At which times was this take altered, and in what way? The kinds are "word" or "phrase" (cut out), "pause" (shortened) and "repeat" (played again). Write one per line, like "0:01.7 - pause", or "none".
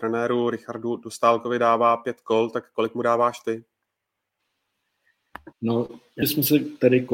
0:05.5 - pause
0:06.2 - word